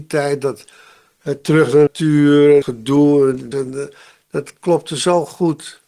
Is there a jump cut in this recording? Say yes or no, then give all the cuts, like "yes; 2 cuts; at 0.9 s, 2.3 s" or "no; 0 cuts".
yes; 3 cuts; at 1.9 s, 2.6 s, 3.5 s